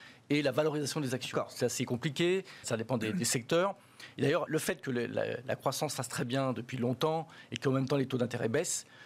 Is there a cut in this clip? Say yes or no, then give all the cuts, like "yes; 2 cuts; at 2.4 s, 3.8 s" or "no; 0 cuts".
yes; 2 cuts; at 2.6 s, 4.5 s